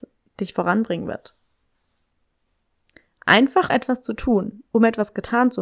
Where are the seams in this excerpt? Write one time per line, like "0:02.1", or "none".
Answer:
0:03.7

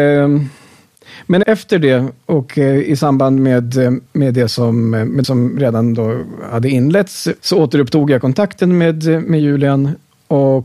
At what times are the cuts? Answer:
0:01.4
0:04.1
0:05.2
0:07.4

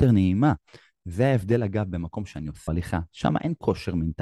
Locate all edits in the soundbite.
0:02.7

